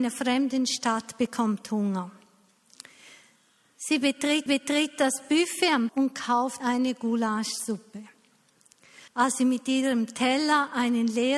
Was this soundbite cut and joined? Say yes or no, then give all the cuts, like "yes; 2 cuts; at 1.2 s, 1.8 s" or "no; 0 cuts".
yes; 4 cuts; at 4.5 s, 5.9 s, 6.6 s, 9.1 s